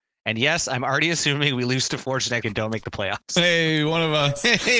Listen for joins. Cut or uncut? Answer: cut